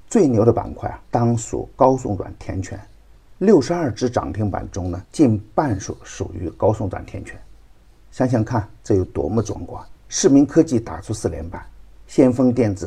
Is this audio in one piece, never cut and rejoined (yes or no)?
no